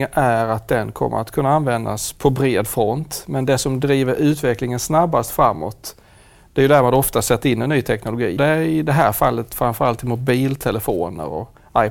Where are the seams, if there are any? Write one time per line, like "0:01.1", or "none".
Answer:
0:08.4